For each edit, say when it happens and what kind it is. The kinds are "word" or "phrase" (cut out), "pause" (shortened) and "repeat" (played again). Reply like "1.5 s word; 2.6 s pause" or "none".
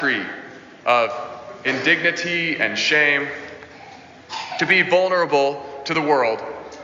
none